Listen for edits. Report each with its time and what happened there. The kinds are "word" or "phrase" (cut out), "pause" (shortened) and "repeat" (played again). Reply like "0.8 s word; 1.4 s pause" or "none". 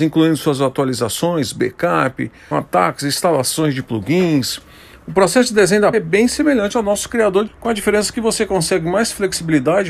2.5 s word; 5.9 s word; 7.5 s word